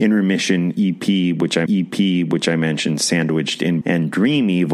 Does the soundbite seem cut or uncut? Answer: cut